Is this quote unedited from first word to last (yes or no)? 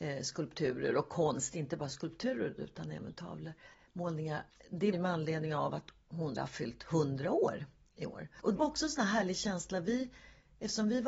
no